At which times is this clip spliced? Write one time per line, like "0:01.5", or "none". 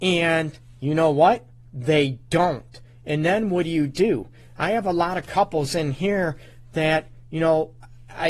none